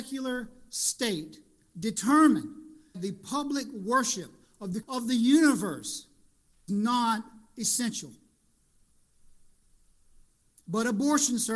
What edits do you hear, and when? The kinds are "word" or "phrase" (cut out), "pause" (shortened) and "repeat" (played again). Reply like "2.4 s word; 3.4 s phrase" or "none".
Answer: 2.9 s word; 4.8 s word; 6.7 s word